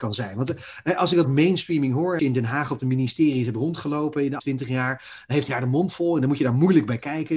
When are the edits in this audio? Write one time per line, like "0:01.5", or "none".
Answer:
0:01.2
0:02.2
0:04.4
0:05.5